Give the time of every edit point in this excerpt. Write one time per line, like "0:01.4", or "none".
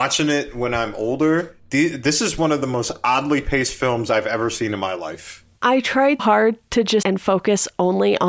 0:01.6
0:06.2
0:07.0